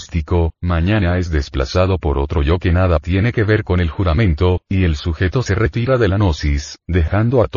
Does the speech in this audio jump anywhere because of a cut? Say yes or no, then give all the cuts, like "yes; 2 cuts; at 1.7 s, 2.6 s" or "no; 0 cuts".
no; 0 cuts